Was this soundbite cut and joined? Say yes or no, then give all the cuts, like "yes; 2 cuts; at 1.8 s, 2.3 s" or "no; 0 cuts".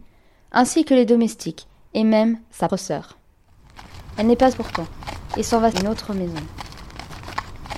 yes; 3 cuts; at 2.7 s, 4.5 s, 5.7 s